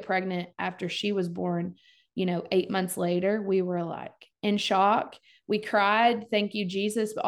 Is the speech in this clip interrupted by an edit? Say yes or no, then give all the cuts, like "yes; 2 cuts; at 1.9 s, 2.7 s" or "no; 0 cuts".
no; 0 cuts